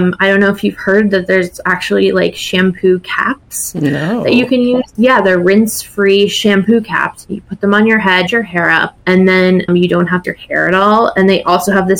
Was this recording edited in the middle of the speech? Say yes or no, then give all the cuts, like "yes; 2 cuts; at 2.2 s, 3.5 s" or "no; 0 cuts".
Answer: yes; 4 cuts; at 8.3 s, 9.0 s, 9.7 s, 10.2 s